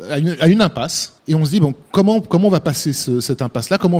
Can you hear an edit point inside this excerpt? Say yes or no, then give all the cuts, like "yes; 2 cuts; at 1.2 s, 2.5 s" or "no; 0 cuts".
yes; 1 cut; at 1.2 s